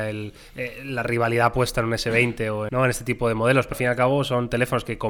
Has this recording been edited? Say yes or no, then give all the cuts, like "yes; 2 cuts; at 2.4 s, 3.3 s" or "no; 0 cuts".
yes; 2 cuts; at 2.7 s, 3.7 s